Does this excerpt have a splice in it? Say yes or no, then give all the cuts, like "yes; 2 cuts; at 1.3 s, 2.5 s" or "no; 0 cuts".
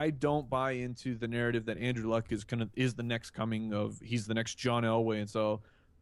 no; 0 cuts